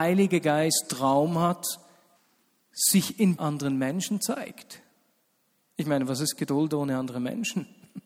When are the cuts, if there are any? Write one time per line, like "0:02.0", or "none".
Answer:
0:02.2
0:03.4